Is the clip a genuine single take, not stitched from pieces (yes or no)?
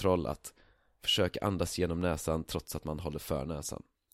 yes